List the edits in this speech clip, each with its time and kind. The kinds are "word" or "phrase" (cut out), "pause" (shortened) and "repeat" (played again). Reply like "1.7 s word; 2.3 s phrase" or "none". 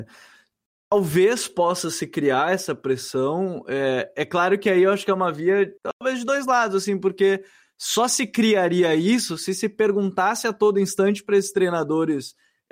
5.8 s pause